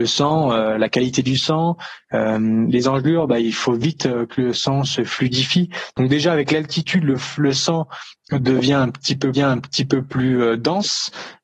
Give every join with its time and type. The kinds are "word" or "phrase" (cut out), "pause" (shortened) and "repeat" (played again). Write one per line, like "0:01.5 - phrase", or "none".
0:09.3 - repeat